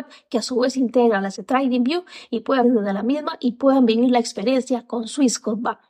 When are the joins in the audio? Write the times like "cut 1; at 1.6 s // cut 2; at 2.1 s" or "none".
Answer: cut 1; at 1.4 s // cut 2; at 2.6 s